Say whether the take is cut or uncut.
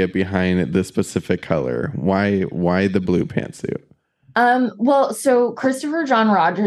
uncut